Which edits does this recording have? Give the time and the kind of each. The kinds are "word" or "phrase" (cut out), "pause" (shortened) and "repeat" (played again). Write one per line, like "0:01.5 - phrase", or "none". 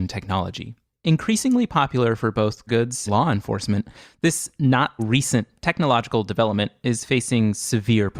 0:02.7 - word
0:03.1 - word
0:05.0 - word